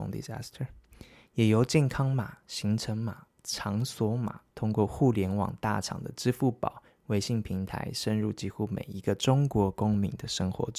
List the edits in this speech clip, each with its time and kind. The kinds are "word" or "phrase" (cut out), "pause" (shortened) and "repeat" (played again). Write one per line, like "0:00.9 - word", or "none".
0:04.5 - pause